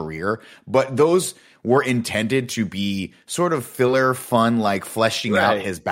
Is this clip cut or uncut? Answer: uncut